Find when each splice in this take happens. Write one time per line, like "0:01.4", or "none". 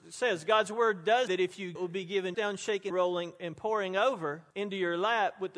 0:01.3
0:01.8
0:02.3
0:02.9
0:04.5